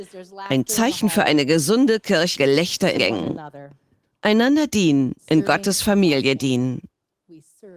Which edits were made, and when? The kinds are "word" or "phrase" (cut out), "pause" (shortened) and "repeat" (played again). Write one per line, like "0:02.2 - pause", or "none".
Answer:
0:02.3 - word
0:03.0 - word
0:05.2 - pause